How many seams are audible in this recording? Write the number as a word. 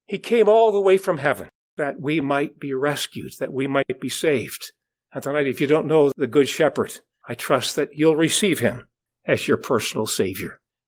zero